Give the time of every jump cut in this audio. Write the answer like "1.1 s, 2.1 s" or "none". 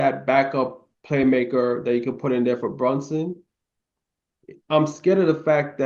0.9 s, 4.6 s